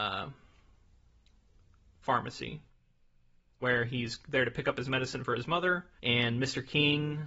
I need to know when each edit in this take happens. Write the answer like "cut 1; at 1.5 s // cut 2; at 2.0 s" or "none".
cut 1; at 6.0 s